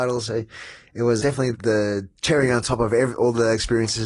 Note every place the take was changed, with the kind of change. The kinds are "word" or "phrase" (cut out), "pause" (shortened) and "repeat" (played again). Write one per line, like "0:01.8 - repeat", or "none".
0:01.2 - word
0:01.5 - word